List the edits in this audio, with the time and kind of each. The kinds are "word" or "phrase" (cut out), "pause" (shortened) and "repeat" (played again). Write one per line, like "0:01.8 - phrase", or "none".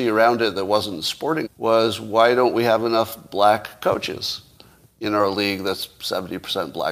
0:01.4 - word